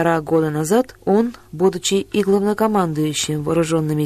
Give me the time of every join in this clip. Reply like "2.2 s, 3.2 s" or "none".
none

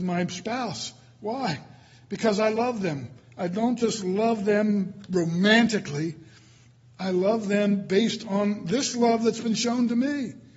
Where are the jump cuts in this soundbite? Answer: none

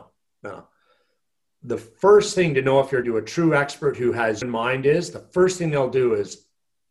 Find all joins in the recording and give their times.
3.0 s, 4.4 s

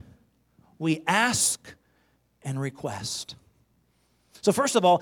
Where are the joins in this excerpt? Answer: none

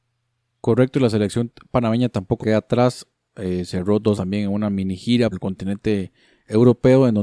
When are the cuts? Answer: 2.4 s, 4.2 s, 5.3 s

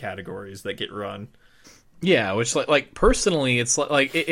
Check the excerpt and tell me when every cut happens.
1.6 s

